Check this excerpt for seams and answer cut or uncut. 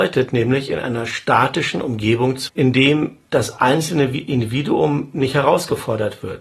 cut